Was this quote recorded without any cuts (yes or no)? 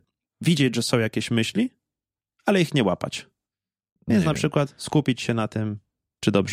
yes